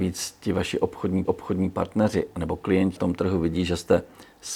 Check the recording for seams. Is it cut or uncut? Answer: cut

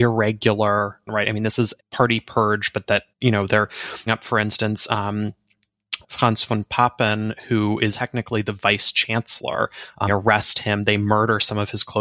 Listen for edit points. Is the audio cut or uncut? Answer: cut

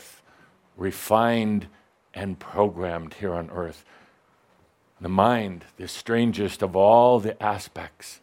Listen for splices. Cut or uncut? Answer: uncut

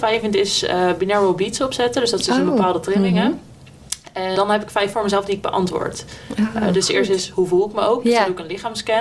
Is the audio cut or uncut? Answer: cut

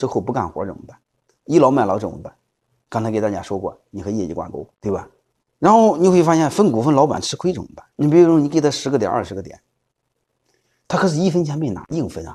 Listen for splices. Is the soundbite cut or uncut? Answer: cut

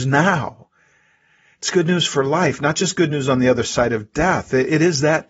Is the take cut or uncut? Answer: uncut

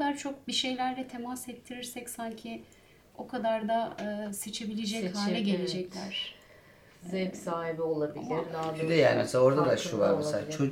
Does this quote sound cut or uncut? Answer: uncut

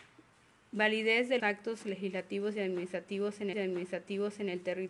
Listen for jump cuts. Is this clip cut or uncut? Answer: cut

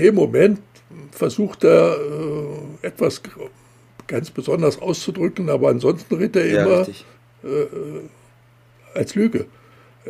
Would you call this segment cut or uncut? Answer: uncut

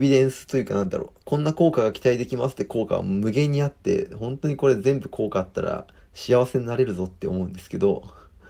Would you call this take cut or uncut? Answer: cut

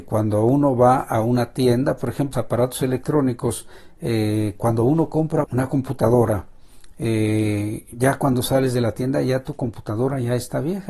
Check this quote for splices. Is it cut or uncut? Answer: cut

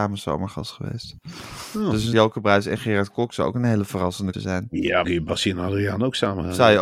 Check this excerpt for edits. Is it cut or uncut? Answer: cut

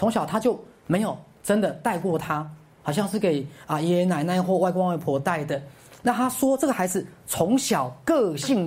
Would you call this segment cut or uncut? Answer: uncut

